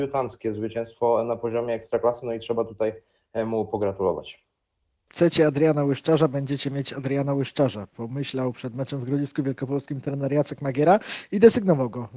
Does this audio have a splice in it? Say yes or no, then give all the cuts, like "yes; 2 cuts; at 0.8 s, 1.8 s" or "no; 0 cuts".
no; 0 cuts